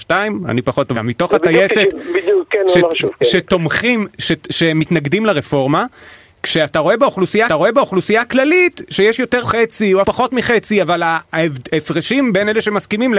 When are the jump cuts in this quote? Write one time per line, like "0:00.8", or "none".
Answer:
0:00.9
0:07.5
0:09.4
0:10.0